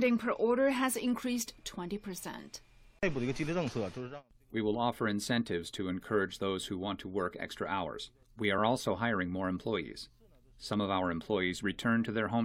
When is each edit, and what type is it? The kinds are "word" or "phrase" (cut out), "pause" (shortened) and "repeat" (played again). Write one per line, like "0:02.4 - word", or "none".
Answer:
none